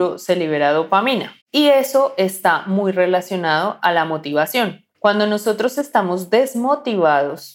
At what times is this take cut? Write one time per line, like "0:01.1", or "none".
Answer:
0:01.4
0:04.9